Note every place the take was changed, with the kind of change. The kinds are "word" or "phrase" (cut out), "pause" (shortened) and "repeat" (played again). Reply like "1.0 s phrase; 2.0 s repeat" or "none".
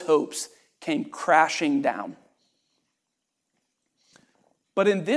none

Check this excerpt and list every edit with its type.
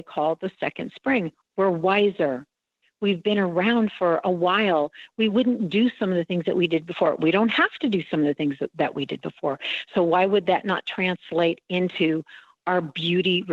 none

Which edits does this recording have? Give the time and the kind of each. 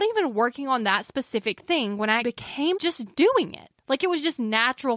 2.2 s word; 2.8 s phrase

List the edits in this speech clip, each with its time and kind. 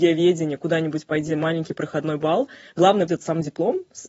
1.3 s word; 3.1 s word

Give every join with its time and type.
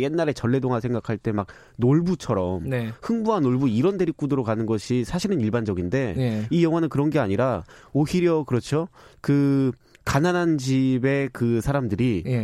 none

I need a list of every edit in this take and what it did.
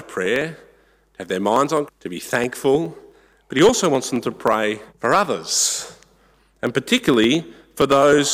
1.9 s word; 4.9 s pause

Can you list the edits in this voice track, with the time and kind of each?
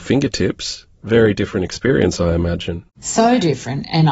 none

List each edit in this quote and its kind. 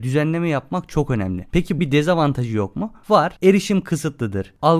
1.8 s word; 3.4 s pause

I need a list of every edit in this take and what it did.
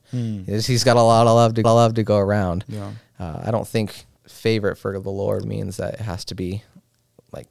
1.6 s repeat; 4.2 s pause; 5.4 s word

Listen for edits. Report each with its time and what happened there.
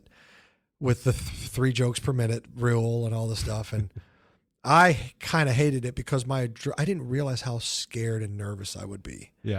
none

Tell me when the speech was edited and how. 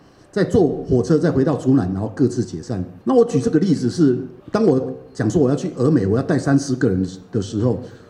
3.0 s pause; 4.4 s pause

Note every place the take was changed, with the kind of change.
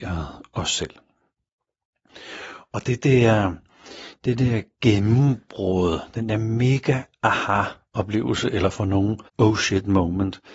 9.3 s pause

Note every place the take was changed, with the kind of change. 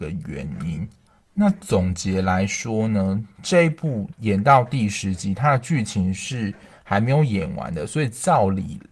none

